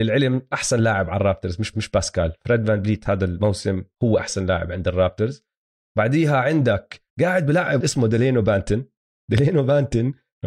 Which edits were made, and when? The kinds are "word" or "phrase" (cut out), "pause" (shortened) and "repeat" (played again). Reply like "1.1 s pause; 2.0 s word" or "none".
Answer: 1.7 s repeat; 7.1 s pause; 7.8 s word